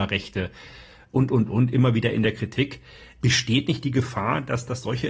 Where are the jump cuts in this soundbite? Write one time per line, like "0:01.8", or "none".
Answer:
none